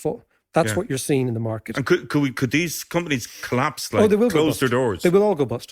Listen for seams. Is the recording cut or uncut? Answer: uncut